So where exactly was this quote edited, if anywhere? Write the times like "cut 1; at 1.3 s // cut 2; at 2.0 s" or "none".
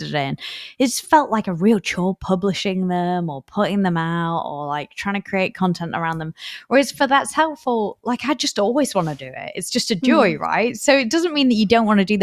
cut 1; at 1.0 s